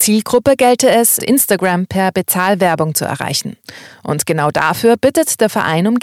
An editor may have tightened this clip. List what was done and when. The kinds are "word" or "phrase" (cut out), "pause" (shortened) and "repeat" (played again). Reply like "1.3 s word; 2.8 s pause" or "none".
1.2 s phrase

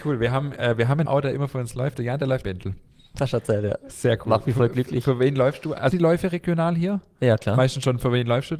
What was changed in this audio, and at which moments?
1.1 s word; 2.4 s phrase; 5.9 s phrase

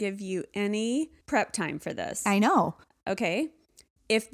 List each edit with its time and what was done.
1.2 s pause

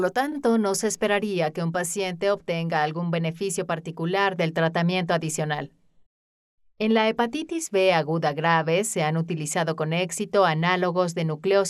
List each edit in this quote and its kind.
none

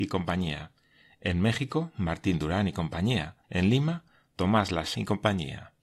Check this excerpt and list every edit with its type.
3.4 s pause; 4.9 s word

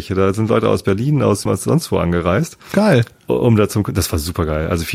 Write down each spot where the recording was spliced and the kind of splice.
1.5 s word

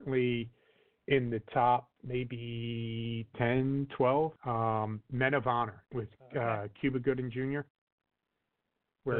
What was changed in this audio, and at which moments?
2.0 s pause; 4.4 s pause; 5.9 s pause

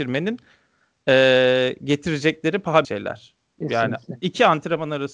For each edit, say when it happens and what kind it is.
2.8 s word

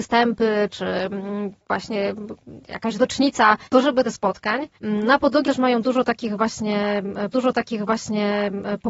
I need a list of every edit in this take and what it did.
1.6 s pause; 3.6 s pause; 4.0 s phrase; 4.7 s pause; 5.4 s word; 7.3 s repeat

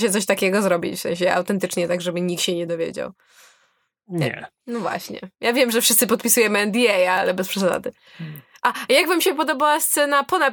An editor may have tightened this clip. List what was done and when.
none

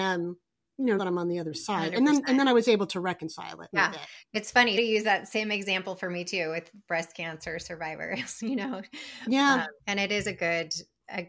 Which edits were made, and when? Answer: 1.0 s word; 3.7 s phrase; 4.8 s word; 9.8 s pause

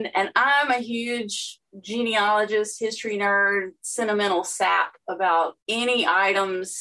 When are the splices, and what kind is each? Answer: 5.6 s pause

